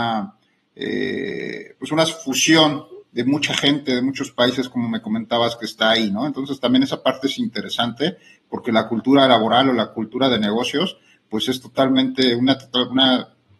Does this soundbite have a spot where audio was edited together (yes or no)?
no